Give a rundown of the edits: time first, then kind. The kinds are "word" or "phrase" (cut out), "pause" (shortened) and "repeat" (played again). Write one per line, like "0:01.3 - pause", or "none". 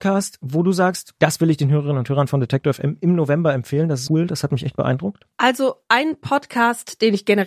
0:01.2 - pause
0:04.1 - word
0:05.3 - pause